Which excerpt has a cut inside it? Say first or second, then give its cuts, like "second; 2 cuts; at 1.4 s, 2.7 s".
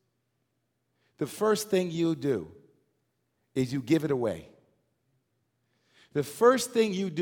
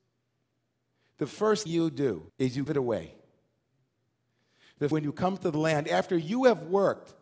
second; 4 cuts; at 1.7 s, 2.3 s, 2.7 s, 4.9 s